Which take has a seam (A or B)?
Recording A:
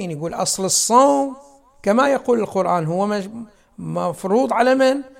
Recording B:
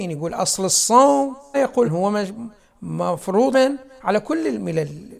B